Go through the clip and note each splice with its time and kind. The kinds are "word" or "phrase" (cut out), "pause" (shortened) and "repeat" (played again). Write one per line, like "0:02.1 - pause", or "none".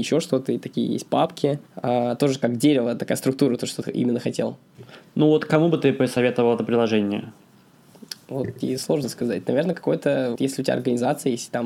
0:01.7 - pause
0:10.3 - word